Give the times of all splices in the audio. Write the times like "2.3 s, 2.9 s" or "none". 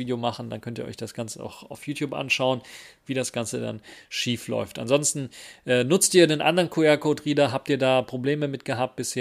none